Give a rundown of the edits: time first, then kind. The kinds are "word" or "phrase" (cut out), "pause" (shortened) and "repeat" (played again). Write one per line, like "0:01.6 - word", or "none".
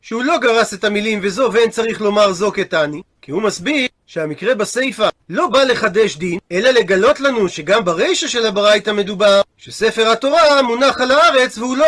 0:06.4 - pause